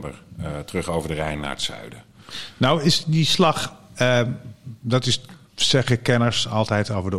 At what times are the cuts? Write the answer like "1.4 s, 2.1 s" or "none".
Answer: 5.5 s